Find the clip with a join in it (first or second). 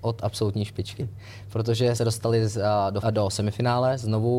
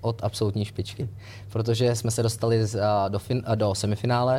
first